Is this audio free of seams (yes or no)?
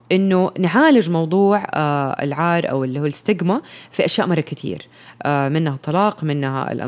yes